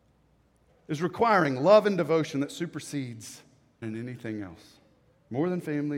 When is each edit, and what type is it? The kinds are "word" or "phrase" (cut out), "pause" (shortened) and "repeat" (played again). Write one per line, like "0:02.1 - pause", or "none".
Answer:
0:03.8 - word

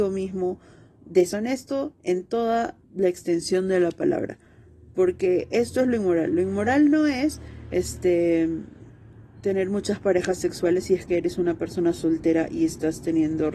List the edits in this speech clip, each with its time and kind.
0:02.8 - pause

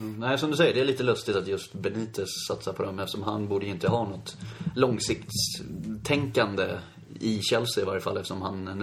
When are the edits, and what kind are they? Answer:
none

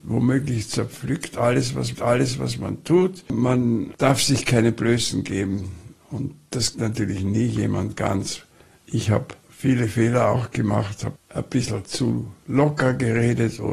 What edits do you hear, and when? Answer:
0:01.9 - repeat
0:06.7 - word
0:09.4 - pause
0:11.2 - word

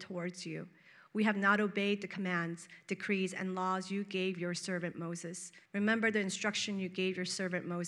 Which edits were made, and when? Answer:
0:05.7 - pause

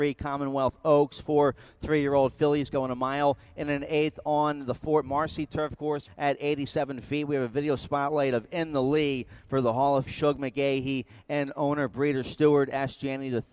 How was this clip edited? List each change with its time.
0:06.1 - word
0:10.1 - word

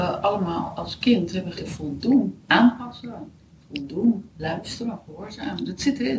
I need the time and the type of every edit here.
0:01.5 - word
0:02.4 - pause

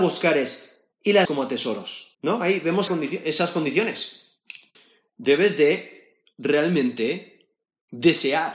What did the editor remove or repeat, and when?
0:01.2 - word
0:02.1 - pause
0:02.9 - word
0:04.7 - pause

